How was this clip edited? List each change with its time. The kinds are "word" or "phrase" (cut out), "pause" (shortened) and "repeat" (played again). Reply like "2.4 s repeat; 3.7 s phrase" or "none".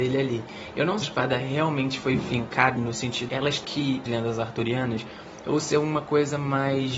1.0 s phrase; 2.8 s word; 3.3 s word; 3.6 s phrase; 4.1 s phrase